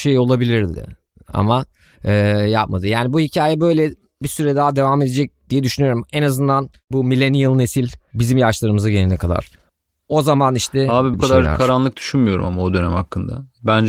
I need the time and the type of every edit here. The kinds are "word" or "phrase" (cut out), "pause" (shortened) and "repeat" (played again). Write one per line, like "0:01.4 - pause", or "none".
0:11.1 - phrase

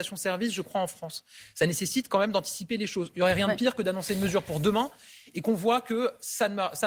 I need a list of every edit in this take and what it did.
none

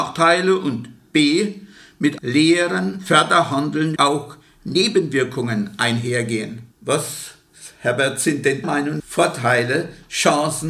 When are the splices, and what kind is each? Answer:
0:02.2 - word
0:04.0 - word
0:06.7 - pause
0:08.6 - word
0:09.0 - word

